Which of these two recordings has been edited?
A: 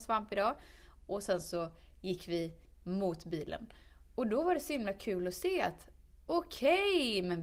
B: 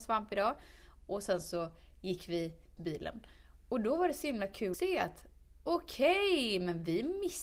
B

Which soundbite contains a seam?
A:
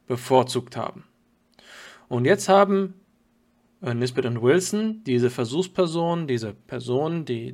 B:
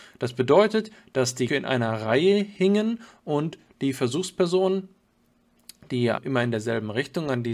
B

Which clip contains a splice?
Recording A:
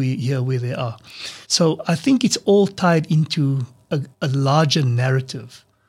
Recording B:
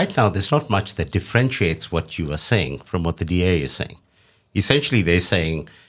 A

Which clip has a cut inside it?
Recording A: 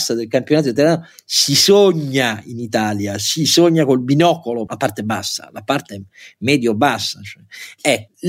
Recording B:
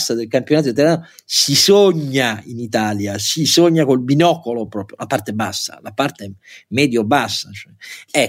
A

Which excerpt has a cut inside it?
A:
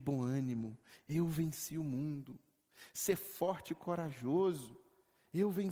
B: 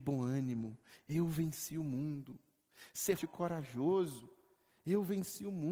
B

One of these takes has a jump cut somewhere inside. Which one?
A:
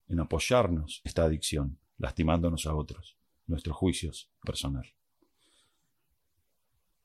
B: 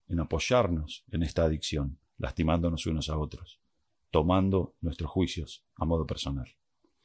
A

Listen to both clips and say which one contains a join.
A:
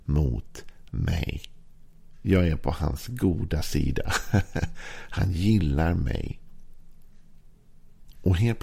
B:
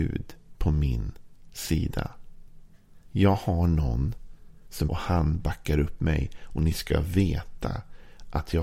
B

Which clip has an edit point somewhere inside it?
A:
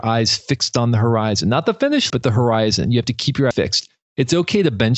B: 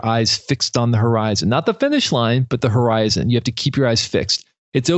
A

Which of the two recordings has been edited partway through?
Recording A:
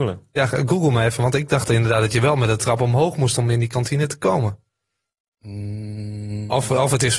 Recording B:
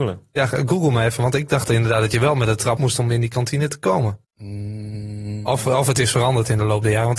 B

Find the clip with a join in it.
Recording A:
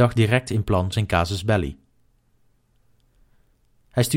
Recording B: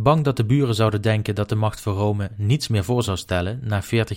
A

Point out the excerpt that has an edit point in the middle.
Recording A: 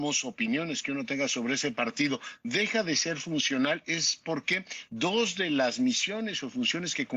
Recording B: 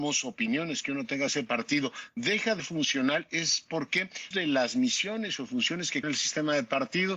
B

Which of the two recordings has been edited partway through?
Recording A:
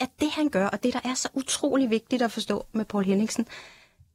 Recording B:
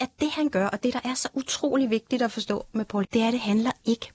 B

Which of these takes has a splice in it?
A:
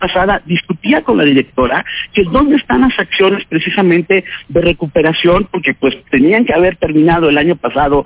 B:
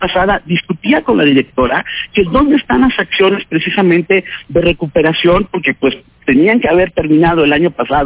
A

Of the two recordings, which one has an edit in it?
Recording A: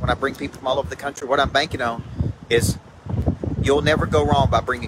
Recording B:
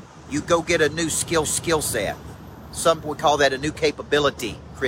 B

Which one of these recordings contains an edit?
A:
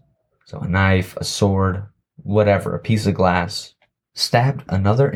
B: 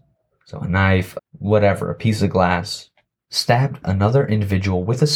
B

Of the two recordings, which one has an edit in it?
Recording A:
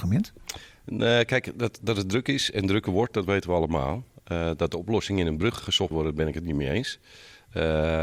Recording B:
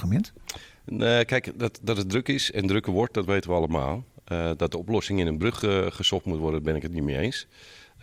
A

